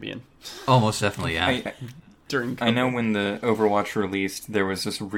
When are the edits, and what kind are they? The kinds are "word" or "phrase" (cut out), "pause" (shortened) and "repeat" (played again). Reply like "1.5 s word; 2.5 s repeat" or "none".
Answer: none